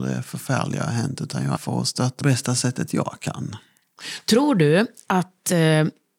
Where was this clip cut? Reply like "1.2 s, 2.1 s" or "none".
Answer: 1.6 s, 2.2 s